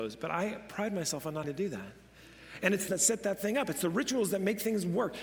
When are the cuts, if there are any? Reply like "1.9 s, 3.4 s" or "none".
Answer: 1.4 s, 2.9 s